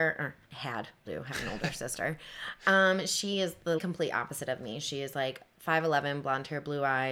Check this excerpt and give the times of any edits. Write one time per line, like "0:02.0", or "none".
0:01.1
0:03.8